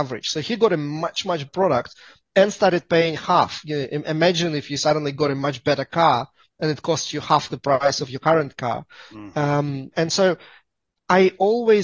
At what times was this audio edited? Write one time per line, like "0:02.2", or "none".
0:01.5
0:09.9